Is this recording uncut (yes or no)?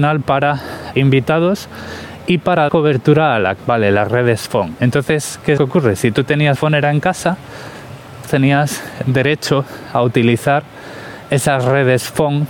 no